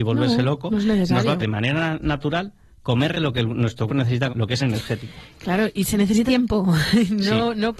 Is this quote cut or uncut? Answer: cut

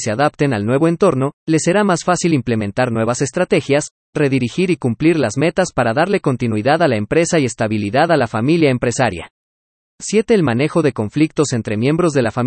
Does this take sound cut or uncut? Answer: uncut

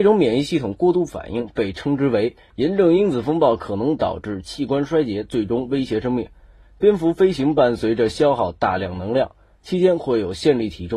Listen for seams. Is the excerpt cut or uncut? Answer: uncut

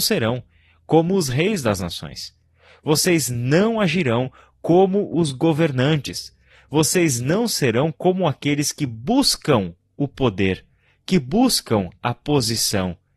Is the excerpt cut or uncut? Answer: uncut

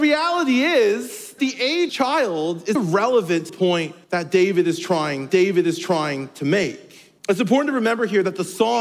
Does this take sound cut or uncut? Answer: cut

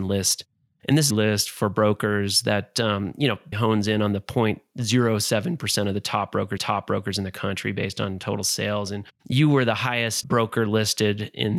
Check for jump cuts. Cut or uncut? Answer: cut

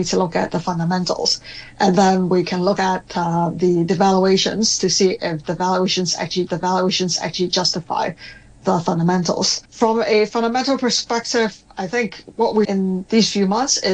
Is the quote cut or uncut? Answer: cut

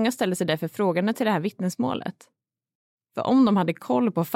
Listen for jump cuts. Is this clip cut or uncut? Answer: uncut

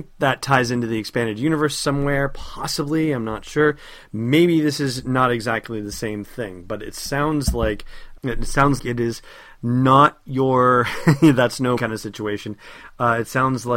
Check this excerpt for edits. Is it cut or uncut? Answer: cut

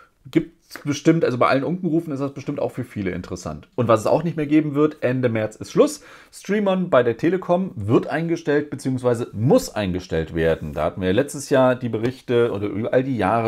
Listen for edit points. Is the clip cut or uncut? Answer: uncut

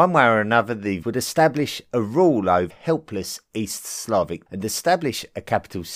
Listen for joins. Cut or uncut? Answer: cut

